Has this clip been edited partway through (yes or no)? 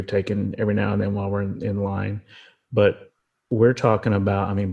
no